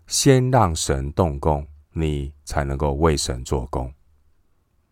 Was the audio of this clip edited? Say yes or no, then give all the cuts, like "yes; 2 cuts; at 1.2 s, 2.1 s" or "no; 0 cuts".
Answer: yes; 1 cut; at 1.8 s